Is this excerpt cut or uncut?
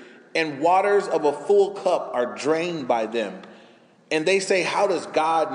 uncut